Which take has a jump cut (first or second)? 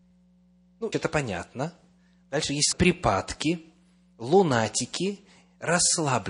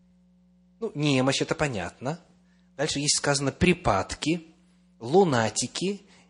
first